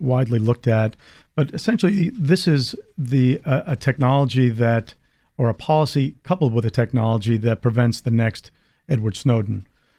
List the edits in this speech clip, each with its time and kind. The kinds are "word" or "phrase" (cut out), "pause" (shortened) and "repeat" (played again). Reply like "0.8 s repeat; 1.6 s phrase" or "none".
none